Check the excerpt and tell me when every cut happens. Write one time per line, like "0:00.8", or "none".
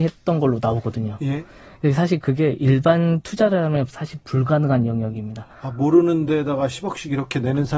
none